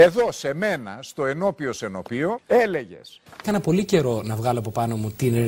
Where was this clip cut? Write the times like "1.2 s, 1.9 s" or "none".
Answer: none